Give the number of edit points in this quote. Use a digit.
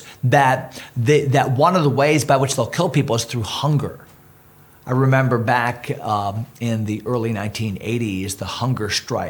0